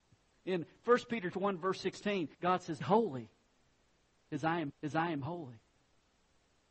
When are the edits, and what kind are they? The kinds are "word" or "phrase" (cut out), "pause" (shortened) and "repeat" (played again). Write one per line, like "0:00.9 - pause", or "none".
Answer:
0:01.3 - word
0:02.3 - pause
0:02.8 - word
0:04.7 - repeat